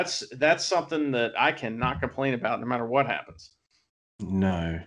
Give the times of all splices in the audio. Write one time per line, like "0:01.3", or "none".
none